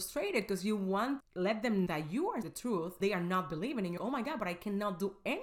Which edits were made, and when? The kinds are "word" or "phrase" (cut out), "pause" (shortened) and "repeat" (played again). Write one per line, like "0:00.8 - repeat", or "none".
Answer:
0:01.2 - word
0:01.9 - word
0:02.4 - word
0:03.0 - word
0:04.0 - word